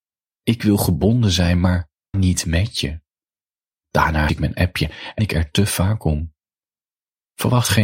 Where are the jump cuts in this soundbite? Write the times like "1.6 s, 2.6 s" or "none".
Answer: 2.1 s, 4.3 s, 5.2 s